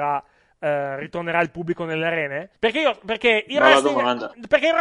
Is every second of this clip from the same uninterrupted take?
no; 1 cut; at 2.6 s

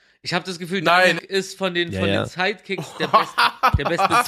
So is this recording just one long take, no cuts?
no; 1 cut; at 1.2 s

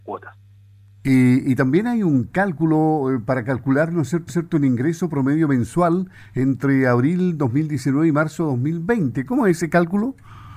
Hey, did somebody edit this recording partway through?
yes; 1 cut; at 4.3 s

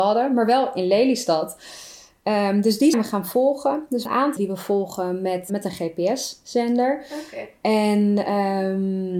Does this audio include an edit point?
yes; 4 cuts; at 2.9 s, 4.1 s, 4.4 s, 5.5 s

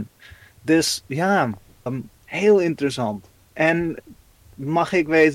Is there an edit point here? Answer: yes; 1 cut; at 1.9 s

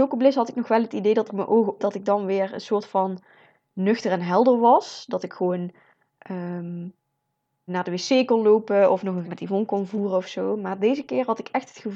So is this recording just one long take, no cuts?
no; 4 cuts; at 1.3 s, 1.8 s, 7.7 s, 9.2 s

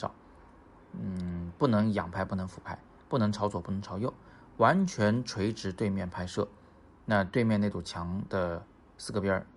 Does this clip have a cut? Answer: no; 0 cuts

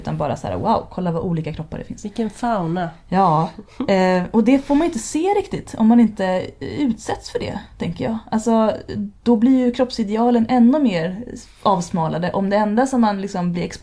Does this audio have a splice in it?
no; 0 cuts

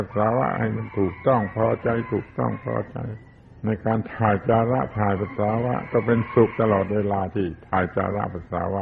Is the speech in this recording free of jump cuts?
no; 1 cut; at 3.4 s

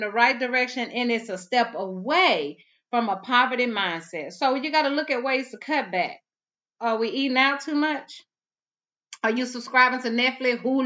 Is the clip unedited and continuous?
yes; 0 cuts

